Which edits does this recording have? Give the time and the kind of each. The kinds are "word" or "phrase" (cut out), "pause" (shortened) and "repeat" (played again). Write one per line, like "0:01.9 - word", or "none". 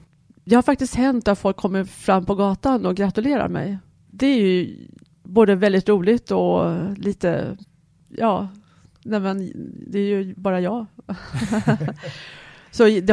none